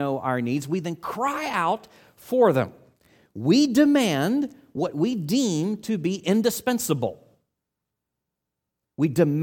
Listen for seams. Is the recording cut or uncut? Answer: uncut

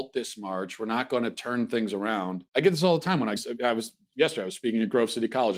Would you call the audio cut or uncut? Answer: cut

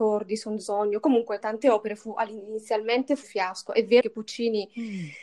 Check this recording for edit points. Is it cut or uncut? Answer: cut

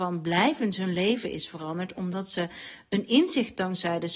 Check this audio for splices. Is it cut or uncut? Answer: uncut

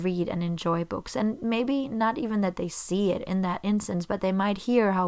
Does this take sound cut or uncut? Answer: uncut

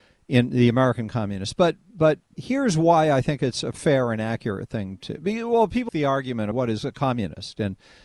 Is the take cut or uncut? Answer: cut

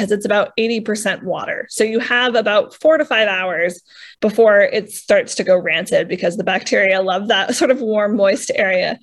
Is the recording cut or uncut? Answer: cut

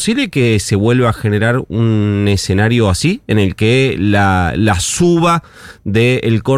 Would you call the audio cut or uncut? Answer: uncut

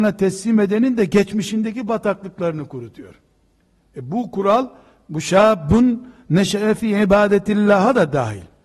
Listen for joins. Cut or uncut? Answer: uncut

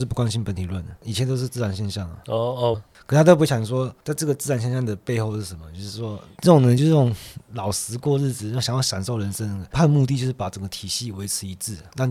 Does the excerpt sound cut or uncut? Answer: cut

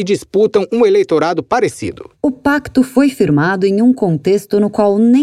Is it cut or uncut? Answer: uncut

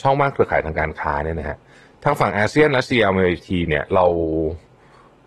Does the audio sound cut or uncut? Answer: uncut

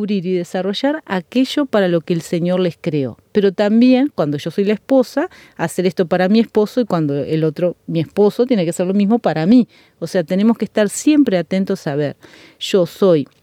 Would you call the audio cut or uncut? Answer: uncut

